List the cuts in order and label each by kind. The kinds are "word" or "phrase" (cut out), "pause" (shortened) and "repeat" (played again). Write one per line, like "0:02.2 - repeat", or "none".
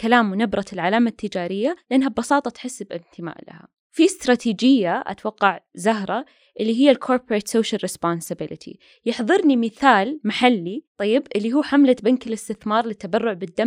none